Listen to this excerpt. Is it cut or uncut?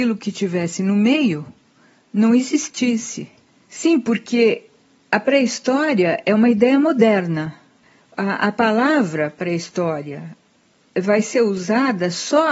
uncut